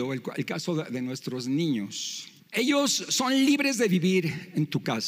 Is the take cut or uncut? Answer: cut